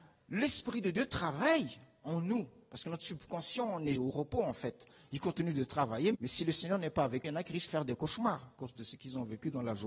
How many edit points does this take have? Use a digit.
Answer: 4